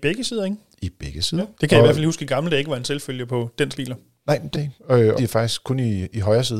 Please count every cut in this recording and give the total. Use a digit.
4